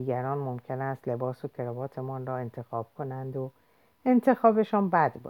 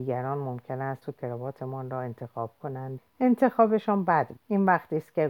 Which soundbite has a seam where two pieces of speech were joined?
second; 3 cuts; at 1.0 s, 3.0 s, 4.4 s

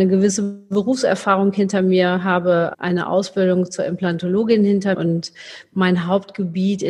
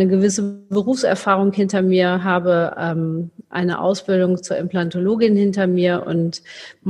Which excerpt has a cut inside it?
first; 2 cuts; at 2.7 s, 4.9 s

